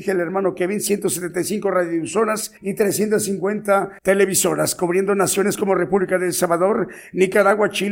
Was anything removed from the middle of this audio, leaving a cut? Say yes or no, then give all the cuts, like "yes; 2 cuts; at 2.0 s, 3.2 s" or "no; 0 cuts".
yes; 2 cuts; at 2.6 s, 4.0 s